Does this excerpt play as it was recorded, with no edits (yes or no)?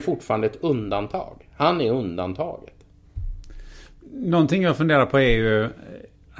yes